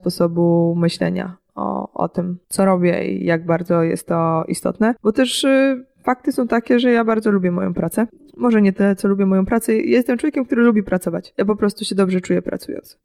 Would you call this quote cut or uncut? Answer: uncut